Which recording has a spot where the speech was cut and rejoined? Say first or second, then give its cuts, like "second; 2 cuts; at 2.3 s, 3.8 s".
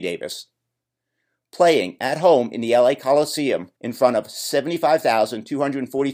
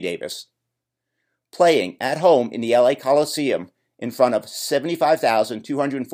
first; 1 cut; at 3.8 s